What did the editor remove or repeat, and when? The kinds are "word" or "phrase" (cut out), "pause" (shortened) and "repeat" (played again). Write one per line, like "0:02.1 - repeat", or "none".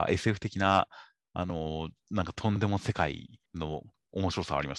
0:03.5 - pause

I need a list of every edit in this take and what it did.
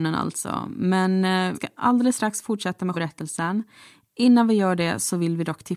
0:01.5 - word
0:02.9 - word

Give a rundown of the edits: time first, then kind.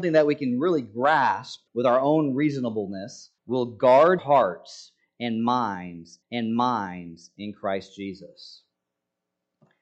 0:01.7 - pause
0:03.4 - pause
0:04.2 - word
0:06.2 - repeat

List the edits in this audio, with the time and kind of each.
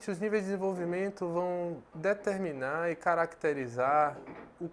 0:01.9 - pause

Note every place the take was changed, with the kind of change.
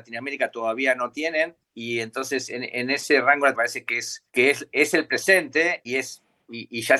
0:01.6 - pause
0:03.5 - word
0:04.3 - pause
0:05.8 - word

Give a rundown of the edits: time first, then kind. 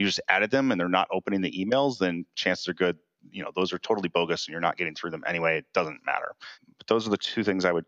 none

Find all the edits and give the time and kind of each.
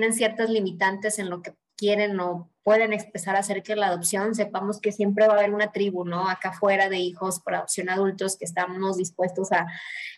none

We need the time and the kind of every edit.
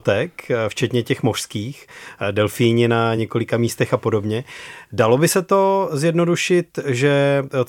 none

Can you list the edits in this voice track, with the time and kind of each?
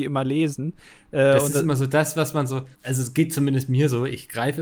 0:02.7 - pause

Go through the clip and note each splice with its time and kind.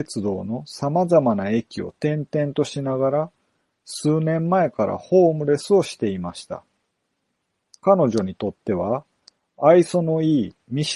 none

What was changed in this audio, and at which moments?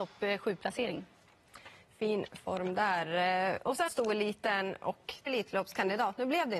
0:03.9 - word
0:05.3 - word

